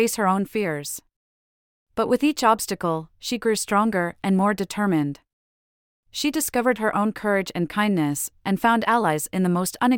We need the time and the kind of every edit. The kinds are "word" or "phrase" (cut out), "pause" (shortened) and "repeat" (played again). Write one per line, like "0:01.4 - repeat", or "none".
none